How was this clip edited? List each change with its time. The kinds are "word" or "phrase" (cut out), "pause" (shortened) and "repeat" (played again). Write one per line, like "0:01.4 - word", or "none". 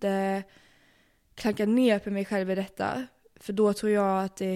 none